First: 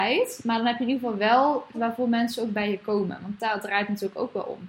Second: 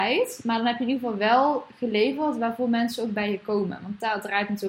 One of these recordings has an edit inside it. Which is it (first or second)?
first